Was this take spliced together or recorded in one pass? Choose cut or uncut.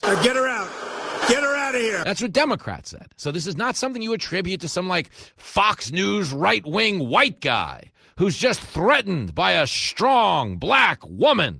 uncut